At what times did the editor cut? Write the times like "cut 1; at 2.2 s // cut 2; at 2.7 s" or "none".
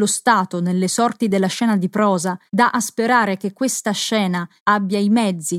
cut 1; at 2.5 s // cut 2; at 4.6 s

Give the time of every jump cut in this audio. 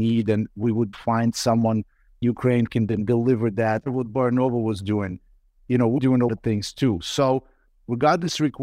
cut 1; at 0.9 s // cut 2; at 2.2 s // cut 3; at 2.7 s // cut 4; at 3.8 s // cut 5; at 6.0 s // cut 6; at 6.3 s

